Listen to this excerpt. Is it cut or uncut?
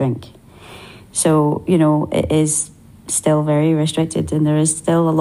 uncut